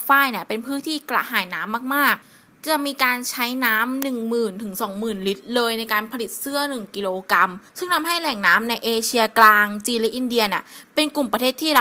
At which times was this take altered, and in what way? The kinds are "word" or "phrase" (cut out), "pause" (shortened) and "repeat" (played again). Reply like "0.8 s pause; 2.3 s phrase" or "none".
2.2 s pause; 7.7 s pause